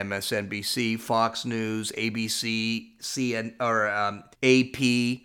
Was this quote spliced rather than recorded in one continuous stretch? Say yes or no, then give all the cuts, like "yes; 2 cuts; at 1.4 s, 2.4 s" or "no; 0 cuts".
yes; 1 cut; at 4.3 s